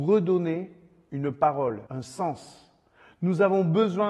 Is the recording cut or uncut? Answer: cut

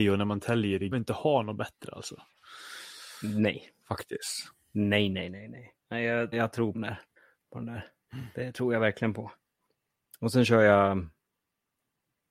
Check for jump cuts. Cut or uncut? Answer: cut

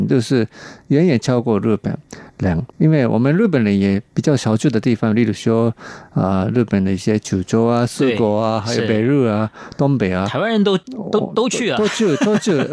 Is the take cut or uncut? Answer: cut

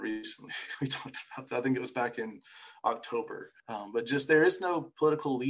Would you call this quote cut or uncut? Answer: cut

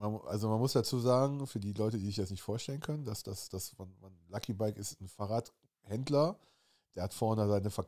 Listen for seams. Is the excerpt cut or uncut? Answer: uncut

